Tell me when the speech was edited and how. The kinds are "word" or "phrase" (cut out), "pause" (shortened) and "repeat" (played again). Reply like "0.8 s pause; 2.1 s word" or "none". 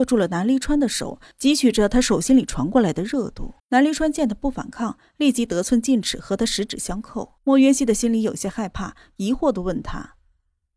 3.6 s pause; 7.4 s pause